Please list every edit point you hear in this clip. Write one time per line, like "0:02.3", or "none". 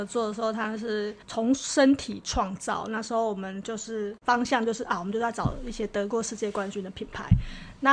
0:01.2